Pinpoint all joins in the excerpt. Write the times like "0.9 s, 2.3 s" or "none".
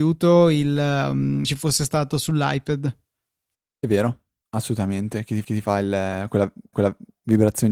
1.4 s, 3.5 s, 5.4 s, 6.7 s